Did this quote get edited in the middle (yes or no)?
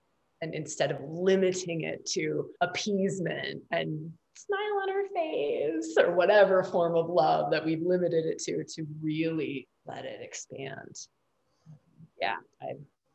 yes